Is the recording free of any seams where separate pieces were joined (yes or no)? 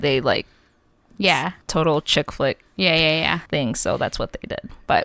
no